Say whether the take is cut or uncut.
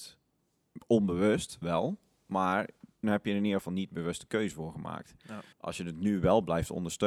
cut